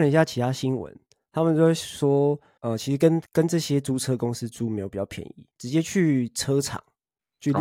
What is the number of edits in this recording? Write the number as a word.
two